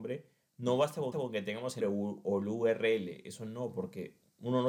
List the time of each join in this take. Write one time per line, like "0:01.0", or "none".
0:01.1
0:01.8